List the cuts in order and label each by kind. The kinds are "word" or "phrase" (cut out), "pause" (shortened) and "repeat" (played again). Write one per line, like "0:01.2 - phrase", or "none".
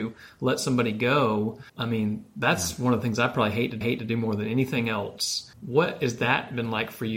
0:01.7 - pause
0:03.8 - repeat
0:05.5 - pause